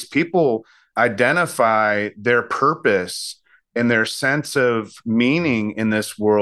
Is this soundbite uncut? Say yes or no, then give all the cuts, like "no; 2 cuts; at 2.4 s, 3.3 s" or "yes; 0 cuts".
yes; 0 cuts